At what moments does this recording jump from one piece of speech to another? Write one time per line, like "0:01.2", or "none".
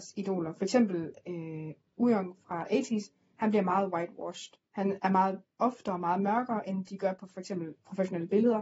0:04.6
0:05.5